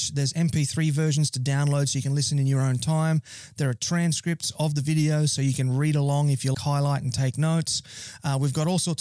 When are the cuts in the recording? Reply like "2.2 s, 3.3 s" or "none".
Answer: 6.5 s